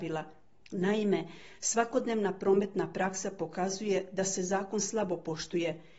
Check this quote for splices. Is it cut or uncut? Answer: uncut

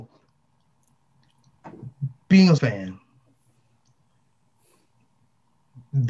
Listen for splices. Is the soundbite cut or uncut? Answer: cut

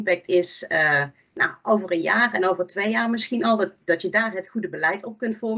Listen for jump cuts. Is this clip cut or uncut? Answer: uncut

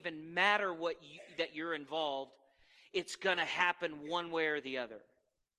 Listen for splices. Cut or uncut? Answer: uncut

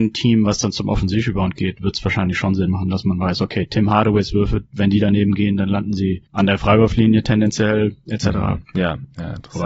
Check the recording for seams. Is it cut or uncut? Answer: uncut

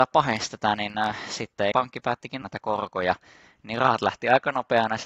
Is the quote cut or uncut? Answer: cut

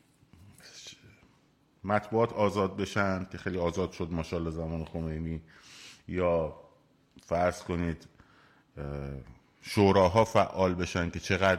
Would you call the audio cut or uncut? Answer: uncut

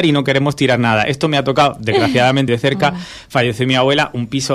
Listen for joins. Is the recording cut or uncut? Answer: cut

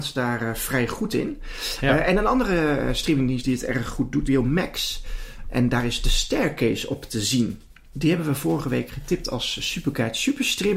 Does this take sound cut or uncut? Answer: cut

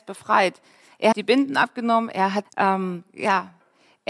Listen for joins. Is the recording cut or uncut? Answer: cut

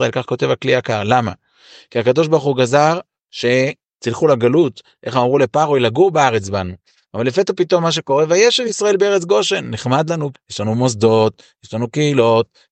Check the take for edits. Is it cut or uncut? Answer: cut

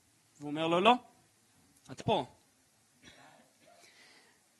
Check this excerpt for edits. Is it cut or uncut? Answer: cut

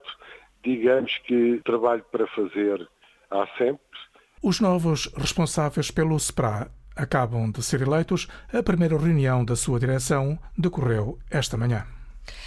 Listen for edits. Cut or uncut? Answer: uncut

